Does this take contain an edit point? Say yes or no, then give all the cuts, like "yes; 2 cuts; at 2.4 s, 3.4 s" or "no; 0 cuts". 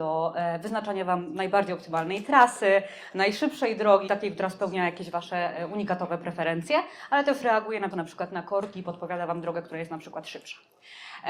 yes; 2 cuts; at 4.1 s, 7.9 s